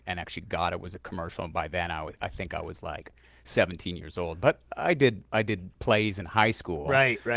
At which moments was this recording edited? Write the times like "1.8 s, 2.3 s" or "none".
none

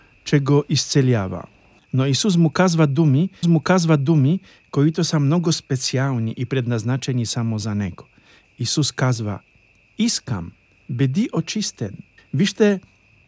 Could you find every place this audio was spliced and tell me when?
3.4 s

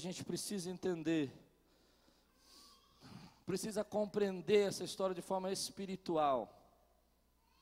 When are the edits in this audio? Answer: none

